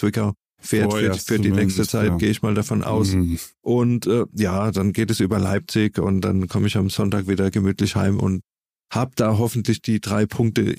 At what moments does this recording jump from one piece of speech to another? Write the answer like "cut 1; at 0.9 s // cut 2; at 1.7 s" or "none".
none